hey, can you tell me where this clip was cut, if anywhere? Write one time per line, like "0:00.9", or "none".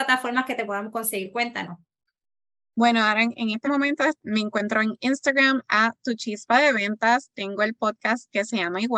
0:03.6